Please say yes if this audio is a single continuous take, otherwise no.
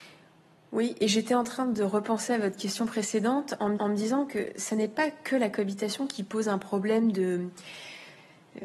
no